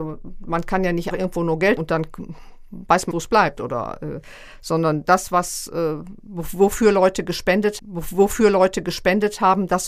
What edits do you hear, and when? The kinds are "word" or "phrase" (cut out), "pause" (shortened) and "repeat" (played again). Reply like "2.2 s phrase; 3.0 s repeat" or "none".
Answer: 1.1 s word; 1.8 s word; 3.1 s word; 7.8 s repeat